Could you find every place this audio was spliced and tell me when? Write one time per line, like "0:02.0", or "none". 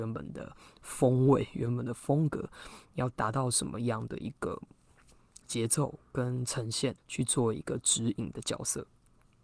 0:07.0